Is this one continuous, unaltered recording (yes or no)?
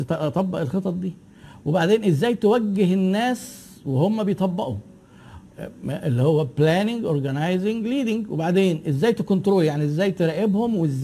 yes